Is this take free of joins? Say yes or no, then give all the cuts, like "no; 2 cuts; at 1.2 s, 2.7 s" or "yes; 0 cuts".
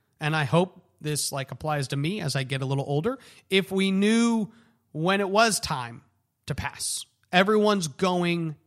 yes; 0 cuts